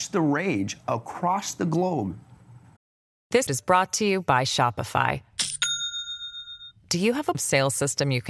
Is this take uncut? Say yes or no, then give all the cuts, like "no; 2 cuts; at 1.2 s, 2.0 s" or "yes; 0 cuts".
no; 2 cuts; at 3.5 s, 7.3 s